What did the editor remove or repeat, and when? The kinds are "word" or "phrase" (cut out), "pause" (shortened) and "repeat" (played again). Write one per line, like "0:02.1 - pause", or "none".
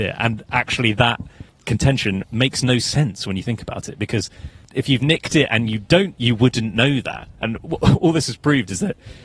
0:06.1 - word
0:07.3 - pause